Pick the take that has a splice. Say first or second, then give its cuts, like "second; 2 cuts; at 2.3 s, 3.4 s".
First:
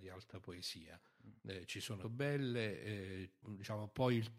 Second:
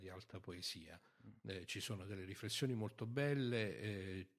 first; 2 cuts; at 2.0 s, 3.4 s